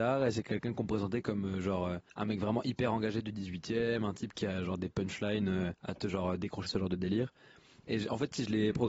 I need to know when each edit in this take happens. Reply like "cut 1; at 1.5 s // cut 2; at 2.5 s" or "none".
cut 1; at 2.1 s // cut 2; at 5.8 s // cut 3; at 6.7 s